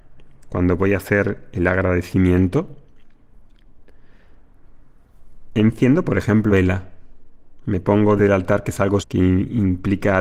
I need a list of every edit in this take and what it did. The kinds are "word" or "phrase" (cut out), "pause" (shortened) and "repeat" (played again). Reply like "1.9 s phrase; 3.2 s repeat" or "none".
6.5 s word; 8.2 s word; 9.0 s word